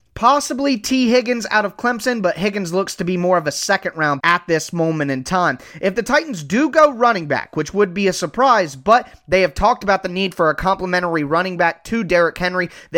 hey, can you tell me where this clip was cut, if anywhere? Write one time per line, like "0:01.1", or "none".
0:04.2